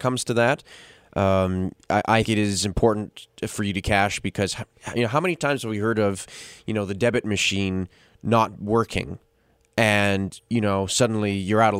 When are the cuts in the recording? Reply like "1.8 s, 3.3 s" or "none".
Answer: 2.2 s, 3.8 s